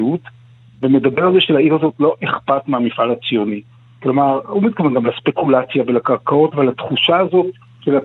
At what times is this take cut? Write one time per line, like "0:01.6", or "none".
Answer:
none

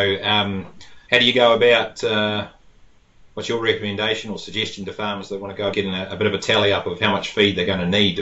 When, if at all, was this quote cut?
0:01.0
0:05.7

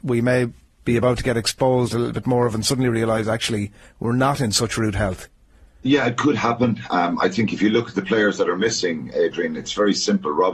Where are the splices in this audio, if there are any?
none

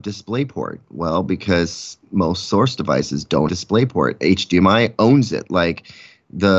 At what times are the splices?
0:03.5

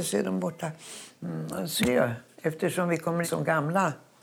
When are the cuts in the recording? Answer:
0:01.8
0:03.2

